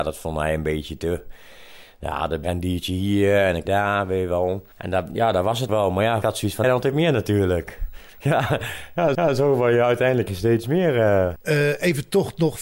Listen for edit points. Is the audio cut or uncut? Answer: cut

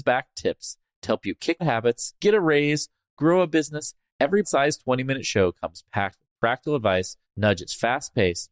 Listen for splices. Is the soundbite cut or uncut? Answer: cut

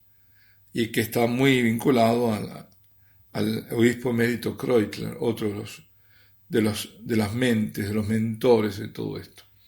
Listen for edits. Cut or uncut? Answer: uncut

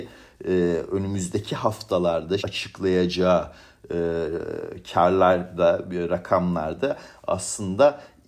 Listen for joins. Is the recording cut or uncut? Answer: cut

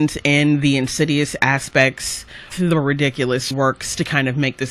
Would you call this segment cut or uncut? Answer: cut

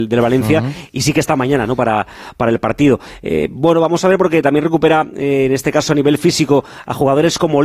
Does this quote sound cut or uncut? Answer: uncut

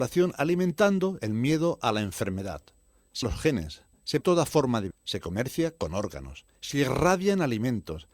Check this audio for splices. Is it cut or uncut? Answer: cut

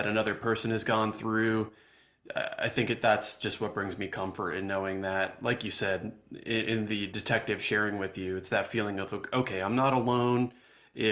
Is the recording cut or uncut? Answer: uncut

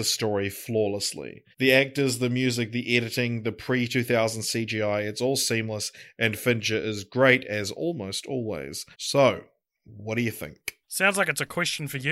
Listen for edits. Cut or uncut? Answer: cut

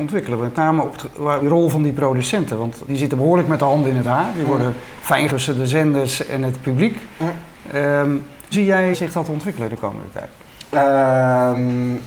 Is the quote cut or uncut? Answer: cut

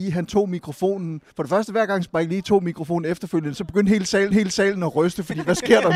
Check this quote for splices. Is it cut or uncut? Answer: cut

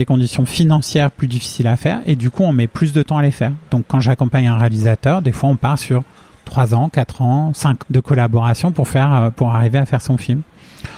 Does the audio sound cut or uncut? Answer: cut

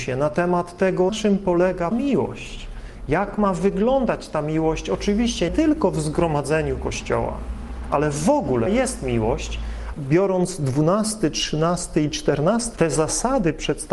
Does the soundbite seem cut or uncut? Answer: cut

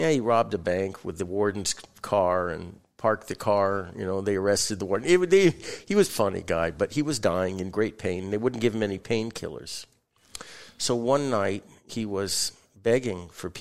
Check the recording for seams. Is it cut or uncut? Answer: cut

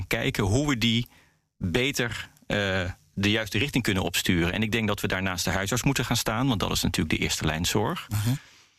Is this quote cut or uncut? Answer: uncut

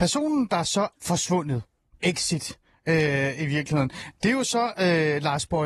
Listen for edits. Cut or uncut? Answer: cut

